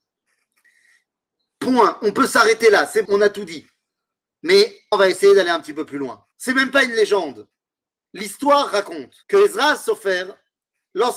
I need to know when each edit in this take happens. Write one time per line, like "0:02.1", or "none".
0:03.0
0:04.9
0:06.3
0:09.2